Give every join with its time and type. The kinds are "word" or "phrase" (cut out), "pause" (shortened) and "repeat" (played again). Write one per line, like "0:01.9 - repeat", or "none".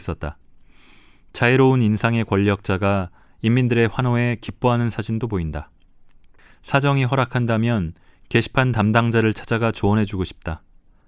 none